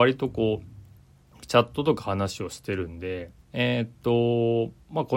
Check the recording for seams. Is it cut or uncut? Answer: cut